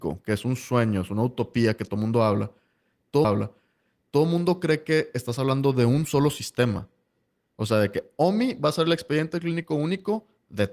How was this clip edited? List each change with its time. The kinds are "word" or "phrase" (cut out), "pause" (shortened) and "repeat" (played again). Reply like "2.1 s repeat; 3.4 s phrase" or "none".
3.2 s repeat

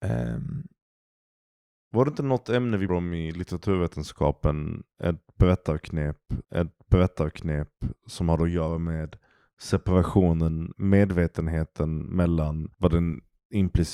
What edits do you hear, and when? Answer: 2.9 s word; 6.4 s repeat; 10.7 s word; 12.7 s pause

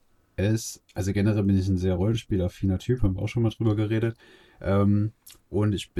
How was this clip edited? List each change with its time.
none

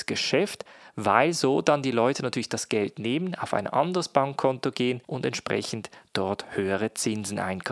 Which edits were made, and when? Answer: 5.0 s pause

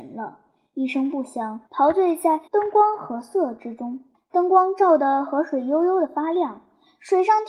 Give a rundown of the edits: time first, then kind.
1.7 s pause; 2.5 s pause; 4.1 s pause

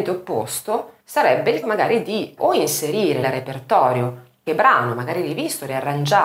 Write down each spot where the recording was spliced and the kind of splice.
1.0 s pause; 1.6 s word; 2.4 s word; 3.2 s word; 4.5 s word

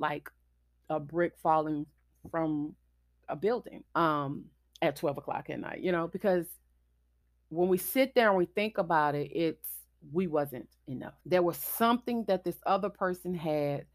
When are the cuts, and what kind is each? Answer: 2.1 s pause; 3.9 s pause; 7.2 s pause; 11.2 s pause

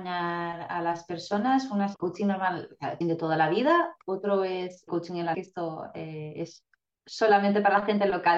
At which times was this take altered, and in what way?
1.9 s word; 3.0 s word; 4.9 s word; 5.3 s word

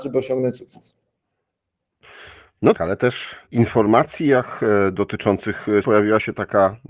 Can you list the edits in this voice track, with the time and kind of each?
2.7 s word; 3.4 s word; 5.8 s word

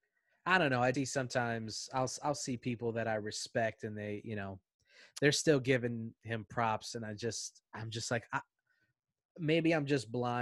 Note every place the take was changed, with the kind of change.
0.9 s word

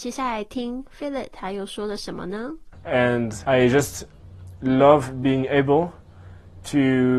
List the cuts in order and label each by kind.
3.4 s word

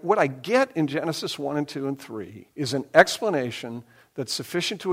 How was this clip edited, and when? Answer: 2.5 s pause

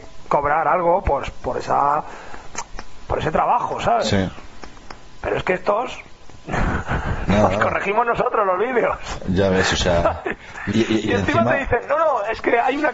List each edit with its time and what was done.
1.3 s word; 10.7 s word

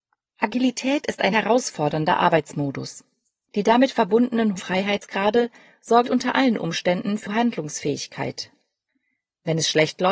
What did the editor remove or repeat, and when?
1.3 s word; 4.6 s word; 6.0 s word

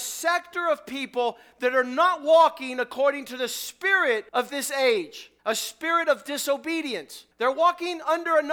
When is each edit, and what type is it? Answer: 4.3 s pause; 5.4 s pause; 7.3 s pause

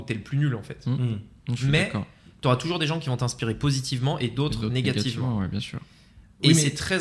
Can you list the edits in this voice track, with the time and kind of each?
none

